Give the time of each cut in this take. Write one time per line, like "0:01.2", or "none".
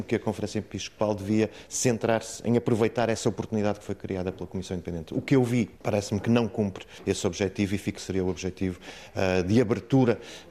0:05.7
0:07.9

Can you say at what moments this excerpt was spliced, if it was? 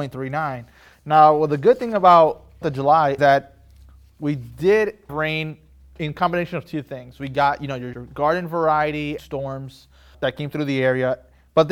0:02.6
0:03.2
0:05.1
0:07.9
0:09.2
0:10.1

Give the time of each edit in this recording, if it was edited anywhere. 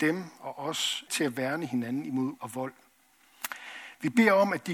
0:01.1
0:02.4

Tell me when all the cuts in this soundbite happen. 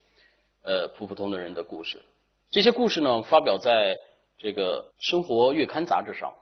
0:04.9

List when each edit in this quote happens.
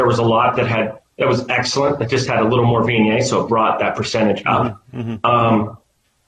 none

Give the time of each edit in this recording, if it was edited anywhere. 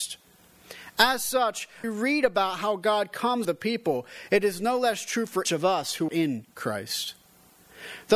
0:01.8
0:03.4
0:05.5
0:06.1

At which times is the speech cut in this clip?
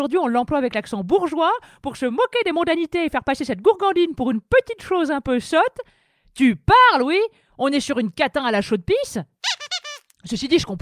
none

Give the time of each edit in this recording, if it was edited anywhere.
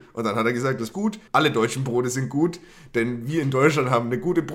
0:00.9
0:01.3

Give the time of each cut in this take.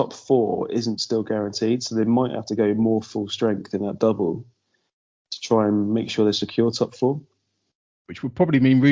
none

